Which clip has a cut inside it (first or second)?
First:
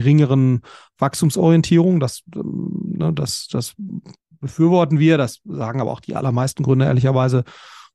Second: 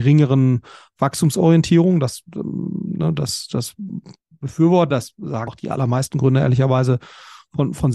second